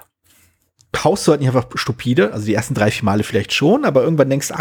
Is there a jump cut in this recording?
no; 0 cuts

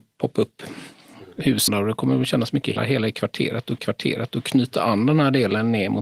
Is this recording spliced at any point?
yes; 3 cuts; at 1.7 s, 2.8 s, 3.8 s

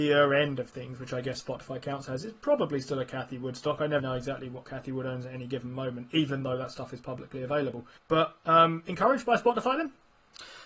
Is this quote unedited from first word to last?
no; 2 cuts; at 4.0 s, 8.0 s

